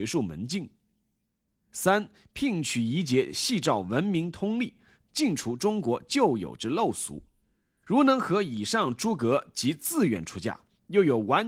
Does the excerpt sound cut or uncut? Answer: uncut